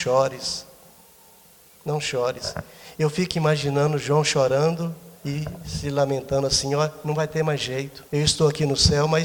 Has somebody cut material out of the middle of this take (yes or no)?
yes